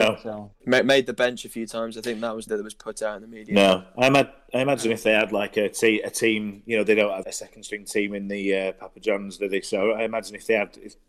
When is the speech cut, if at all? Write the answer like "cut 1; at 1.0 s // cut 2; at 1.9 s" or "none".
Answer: cut 1; at 2.5 s // cut 2; at 7.2 s